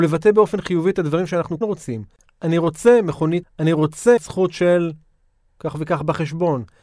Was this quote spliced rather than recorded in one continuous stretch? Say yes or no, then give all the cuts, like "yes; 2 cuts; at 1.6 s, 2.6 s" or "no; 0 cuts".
yes; 3 cuts; at 1.6 s, 3.4 s, 4.2 s